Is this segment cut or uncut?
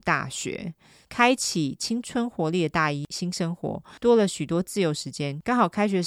uncut